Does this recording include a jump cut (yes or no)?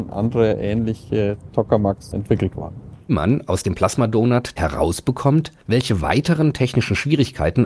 yes